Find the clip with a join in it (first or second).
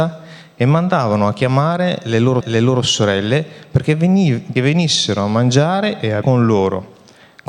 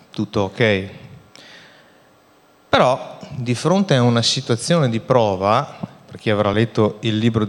first